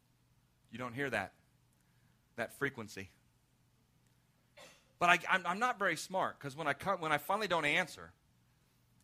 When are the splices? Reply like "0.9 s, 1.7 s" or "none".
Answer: none